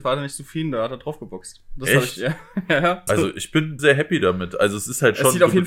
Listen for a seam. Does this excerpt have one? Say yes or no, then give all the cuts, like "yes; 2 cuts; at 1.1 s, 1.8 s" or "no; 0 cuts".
yes; 2 cuts; at 3.1 s, 3.8 s